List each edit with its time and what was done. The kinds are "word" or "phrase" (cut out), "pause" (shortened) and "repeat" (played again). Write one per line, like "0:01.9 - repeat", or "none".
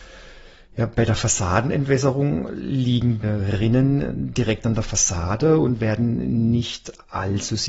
0:03.2 - word

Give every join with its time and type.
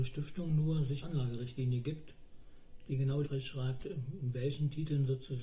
0:01.0 - word
0:03.2 - phrase

